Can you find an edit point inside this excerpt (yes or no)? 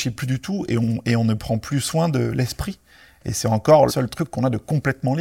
yes